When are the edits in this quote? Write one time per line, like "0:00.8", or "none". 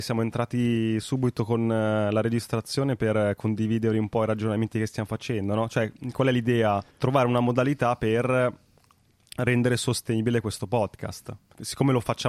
0:06.9